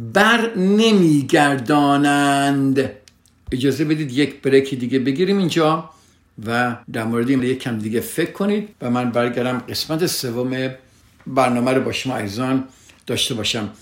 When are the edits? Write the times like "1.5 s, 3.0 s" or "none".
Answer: 6.8 s, 7.4 s, 8.7 s